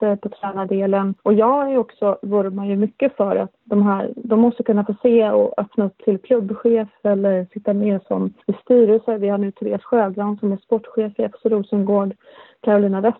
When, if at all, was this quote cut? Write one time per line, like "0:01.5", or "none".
0:01.2
0:03.6
0:08.4